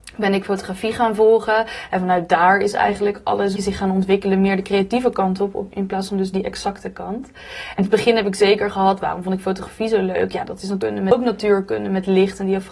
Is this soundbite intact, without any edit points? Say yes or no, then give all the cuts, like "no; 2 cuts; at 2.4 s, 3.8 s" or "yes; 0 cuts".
no; 2 cuts; at 3.6 s, 7.8 s